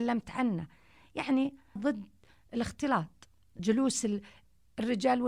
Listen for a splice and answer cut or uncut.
cut